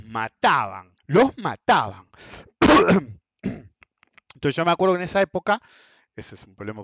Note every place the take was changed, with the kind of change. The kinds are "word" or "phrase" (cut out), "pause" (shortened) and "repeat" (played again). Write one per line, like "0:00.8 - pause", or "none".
0:01.0 - pause